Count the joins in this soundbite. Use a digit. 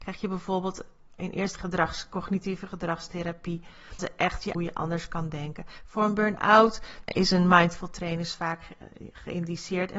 4